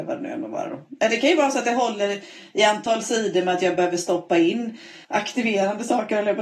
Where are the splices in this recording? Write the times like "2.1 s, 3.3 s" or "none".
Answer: 5.0 s